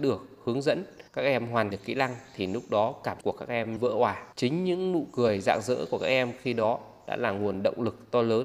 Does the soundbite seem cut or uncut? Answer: cut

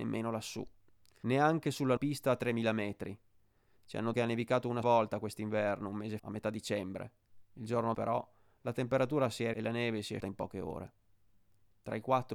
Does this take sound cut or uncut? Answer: cut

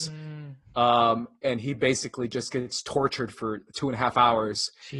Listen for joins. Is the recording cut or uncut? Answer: uncut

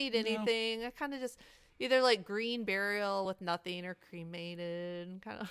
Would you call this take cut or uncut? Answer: uncut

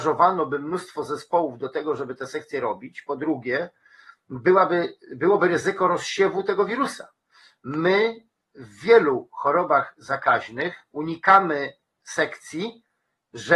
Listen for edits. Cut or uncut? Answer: uncut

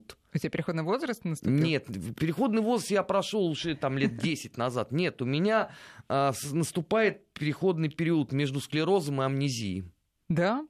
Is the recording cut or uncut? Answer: uncut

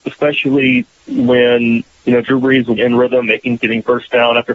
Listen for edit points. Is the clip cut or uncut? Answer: cut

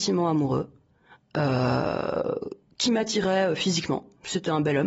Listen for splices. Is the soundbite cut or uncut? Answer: uncut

